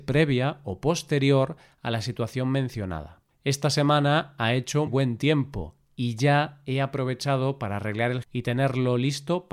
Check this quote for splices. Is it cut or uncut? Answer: cut